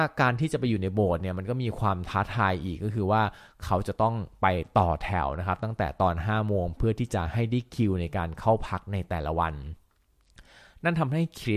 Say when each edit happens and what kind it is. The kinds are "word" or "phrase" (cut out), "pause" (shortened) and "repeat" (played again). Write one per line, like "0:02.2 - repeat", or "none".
none

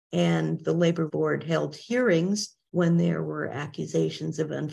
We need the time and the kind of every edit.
0:01.1 - word
0:02.7 - pause

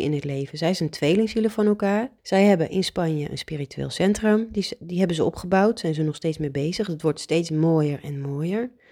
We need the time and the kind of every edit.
0:02.2 - pause

